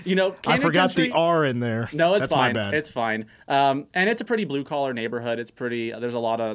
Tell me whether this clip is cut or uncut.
uncut